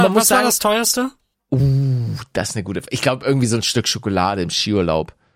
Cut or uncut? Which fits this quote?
uncut